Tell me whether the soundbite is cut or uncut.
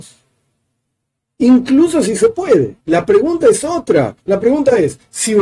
cut